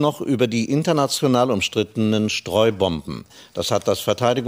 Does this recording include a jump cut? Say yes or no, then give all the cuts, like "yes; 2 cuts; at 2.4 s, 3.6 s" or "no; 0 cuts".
no; 0 cuts